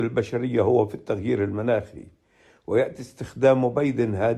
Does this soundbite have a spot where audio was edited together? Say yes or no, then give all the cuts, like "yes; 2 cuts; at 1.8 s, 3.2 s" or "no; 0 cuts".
no; 0 cuts